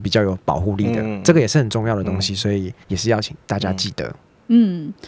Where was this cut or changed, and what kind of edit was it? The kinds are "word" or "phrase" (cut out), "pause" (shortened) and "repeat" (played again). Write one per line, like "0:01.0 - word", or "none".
0:02.8 - pause